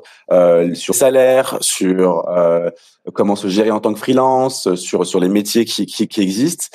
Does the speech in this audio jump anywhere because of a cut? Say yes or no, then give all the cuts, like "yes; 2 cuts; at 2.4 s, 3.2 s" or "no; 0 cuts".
yes; 1 cut; at 0.9 s